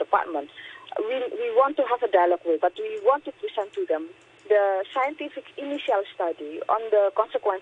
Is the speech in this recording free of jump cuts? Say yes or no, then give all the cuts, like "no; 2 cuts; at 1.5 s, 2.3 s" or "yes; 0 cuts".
no; 2 cuts; at 2.6 s, 5.5 s